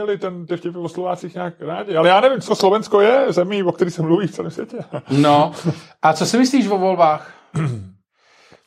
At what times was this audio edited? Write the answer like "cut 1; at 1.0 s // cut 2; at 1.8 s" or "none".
cut 1; at 2.5 s